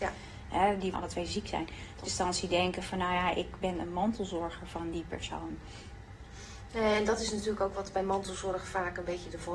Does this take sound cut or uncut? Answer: cut